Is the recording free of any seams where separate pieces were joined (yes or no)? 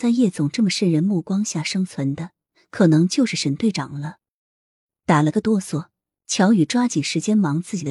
yes